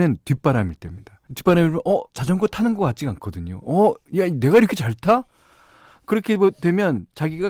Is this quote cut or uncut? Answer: cut